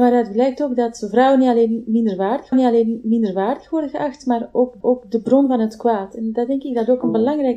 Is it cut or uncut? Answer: cut